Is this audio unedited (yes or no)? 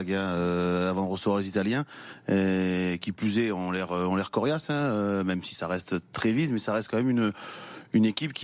yes